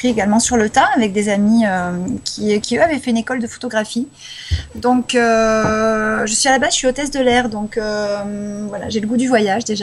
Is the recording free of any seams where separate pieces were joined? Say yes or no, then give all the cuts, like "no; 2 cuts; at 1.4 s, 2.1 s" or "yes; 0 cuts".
yes; 0 cuts